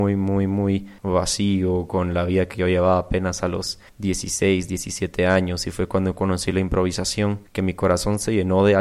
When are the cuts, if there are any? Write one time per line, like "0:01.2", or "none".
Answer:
0:01.0
0:03.9
0:07.5